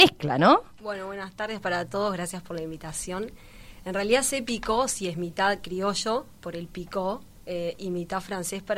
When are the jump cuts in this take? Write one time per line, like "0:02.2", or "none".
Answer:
none